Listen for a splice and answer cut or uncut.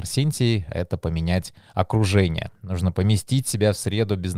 uncut